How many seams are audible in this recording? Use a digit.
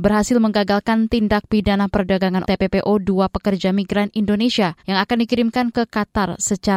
2